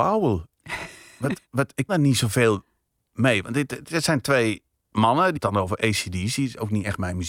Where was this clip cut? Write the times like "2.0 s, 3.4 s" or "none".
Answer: 1.5 s, 1.9 s, 5.4 s